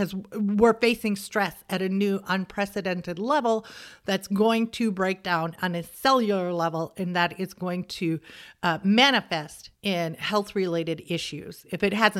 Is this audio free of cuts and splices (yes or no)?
no